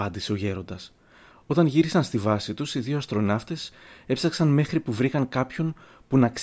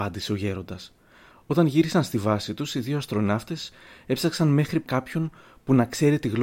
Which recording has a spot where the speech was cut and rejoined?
second; 1 cut; at 4.9 s

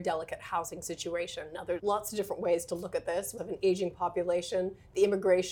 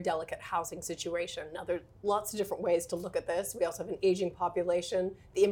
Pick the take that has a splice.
first; 2 cuts; at 1.8 s, 3.4 s

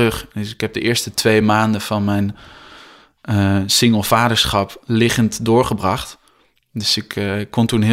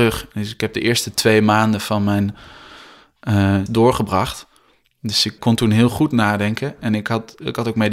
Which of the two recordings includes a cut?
second; 2 cuts; at 3.7 s, 5.4 s

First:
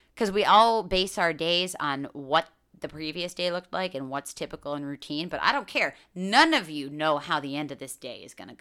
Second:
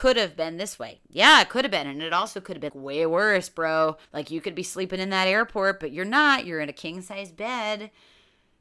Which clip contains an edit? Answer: second; 2 cuts; at 2.7 s, 4.0 s

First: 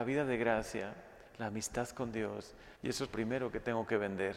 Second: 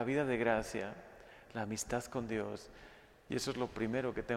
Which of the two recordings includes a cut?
first; 3 cuts; at 1.3 s, 2.8 s, 3.1 s

